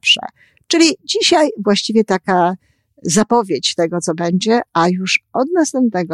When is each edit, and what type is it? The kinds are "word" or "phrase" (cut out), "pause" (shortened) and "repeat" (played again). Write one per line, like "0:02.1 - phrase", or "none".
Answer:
none